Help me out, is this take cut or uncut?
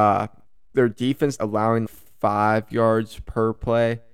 cut